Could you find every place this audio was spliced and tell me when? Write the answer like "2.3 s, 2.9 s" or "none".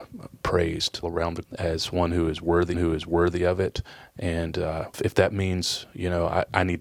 1.0 s, 1.4 s, 2.7 s, 4.9 s